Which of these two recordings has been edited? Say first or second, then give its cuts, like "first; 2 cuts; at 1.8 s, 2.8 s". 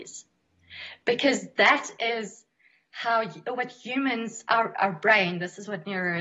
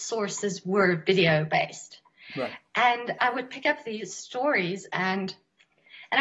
second; 1 cut; at 3.2 s